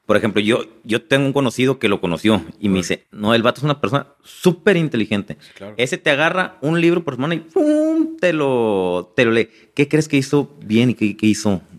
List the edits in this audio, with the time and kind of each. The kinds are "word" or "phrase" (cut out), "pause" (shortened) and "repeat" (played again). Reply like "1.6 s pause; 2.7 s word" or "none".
none